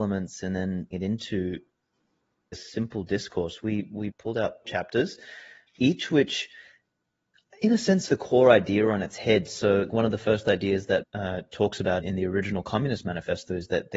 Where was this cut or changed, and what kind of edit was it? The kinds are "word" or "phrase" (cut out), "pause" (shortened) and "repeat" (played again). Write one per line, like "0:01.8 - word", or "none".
0:00.9 - word
0:02.5 - word
0:04.1 - word
0:04.6 - word
0:05.7 - word
0:08.1 - word
0:09.9 - word
0:11.0 - word
0:12.0 - word